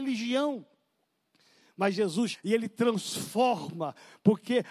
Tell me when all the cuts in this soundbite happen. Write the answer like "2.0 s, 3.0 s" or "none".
2.3 s